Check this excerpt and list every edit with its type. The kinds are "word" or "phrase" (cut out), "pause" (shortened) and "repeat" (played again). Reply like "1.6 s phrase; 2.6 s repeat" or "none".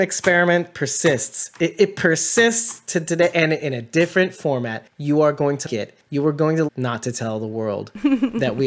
5.7 s word; 6.7 s phrase